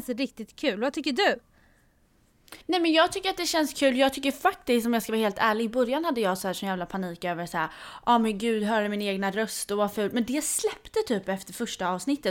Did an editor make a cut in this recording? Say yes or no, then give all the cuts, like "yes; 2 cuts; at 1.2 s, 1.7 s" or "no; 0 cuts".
yes; 1 cut; at 2.6 s